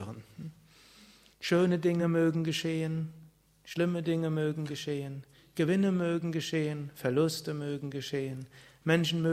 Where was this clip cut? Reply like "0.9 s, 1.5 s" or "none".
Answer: none